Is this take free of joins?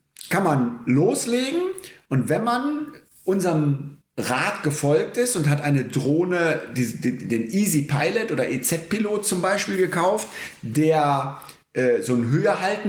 yes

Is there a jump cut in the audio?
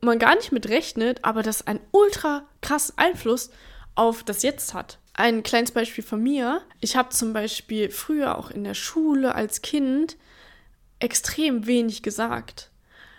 yes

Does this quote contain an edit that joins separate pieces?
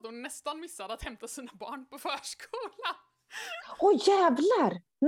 no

